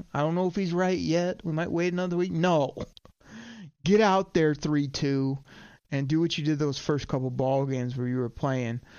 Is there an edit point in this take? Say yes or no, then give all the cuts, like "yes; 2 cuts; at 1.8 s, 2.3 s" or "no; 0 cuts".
no; 0 cuts